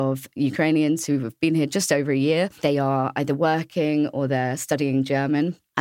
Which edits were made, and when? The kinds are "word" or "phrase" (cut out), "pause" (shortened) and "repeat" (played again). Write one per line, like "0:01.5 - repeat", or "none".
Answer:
none